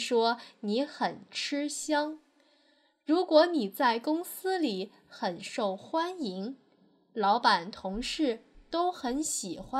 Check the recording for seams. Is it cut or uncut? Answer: uncut